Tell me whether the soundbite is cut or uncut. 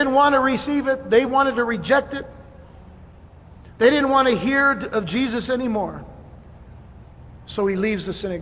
uncut